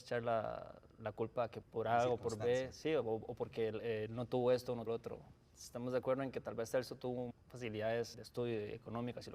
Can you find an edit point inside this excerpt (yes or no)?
yes